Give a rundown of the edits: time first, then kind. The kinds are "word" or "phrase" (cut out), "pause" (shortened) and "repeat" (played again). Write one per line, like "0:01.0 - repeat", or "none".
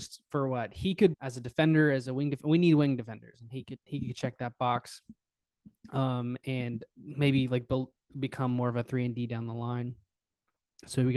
0:01.1 - word
0:06.9 - word